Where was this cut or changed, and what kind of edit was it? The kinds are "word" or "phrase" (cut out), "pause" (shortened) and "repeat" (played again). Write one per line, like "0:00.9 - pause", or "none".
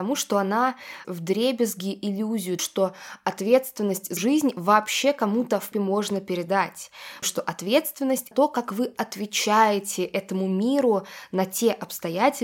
0:01.0 - word
0:02.6 - word
0:04.2 - word
0:05.7 - word
0:07.2 - word
0:08.3 - word